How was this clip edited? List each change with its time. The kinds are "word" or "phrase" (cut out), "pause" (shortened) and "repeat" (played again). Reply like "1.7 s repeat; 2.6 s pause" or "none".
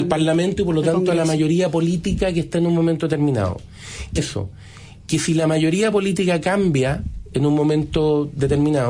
4.2 s word